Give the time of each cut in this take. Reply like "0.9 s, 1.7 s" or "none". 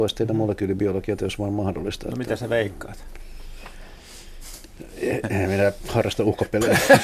1.2 s, 5.2 s